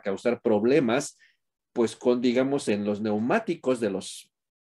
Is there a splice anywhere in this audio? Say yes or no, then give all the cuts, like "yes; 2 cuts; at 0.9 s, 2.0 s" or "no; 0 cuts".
no; 0 cuts